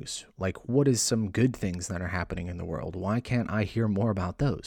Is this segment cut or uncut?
uncut